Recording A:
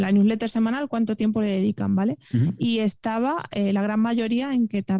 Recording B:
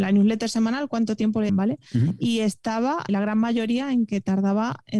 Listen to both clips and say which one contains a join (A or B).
B